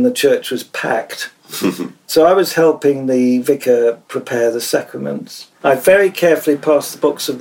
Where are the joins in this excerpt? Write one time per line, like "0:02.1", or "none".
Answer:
0:05.6